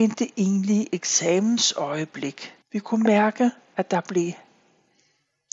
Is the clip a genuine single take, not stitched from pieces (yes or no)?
no